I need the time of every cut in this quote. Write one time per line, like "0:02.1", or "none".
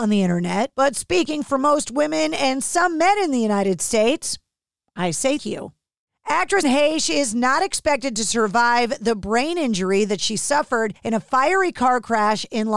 0:05.4
0:06.6
0:11.0